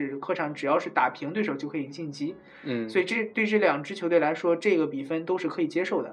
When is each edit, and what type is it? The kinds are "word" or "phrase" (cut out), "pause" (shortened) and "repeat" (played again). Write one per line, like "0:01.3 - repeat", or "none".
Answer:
none